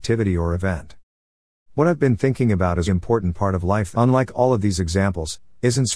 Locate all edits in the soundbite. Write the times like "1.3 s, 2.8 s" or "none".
2.9 s, 3.9 s